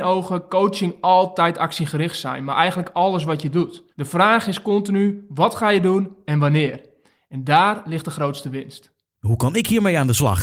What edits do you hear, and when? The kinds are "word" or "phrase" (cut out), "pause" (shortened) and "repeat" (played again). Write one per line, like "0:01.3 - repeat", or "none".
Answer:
0:03.9 - pause